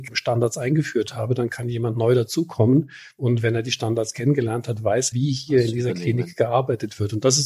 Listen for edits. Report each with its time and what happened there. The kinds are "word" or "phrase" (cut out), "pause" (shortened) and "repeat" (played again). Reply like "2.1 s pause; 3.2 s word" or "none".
5.1 s word